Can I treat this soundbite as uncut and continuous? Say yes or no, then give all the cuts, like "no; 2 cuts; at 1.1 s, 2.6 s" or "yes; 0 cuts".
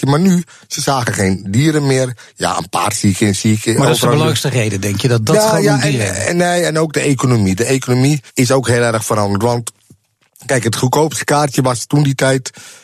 no; 1 cut; at 8.3 s